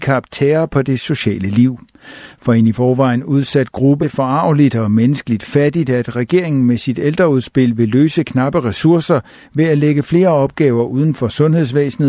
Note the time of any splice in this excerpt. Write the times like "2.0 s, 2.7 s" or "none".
4.0 s